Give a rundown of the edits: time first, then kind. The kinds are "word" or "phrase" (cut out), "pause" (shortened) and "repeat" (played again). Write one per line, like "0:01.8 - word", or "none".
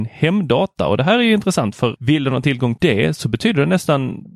0:02.0 - word
0:02.8 - word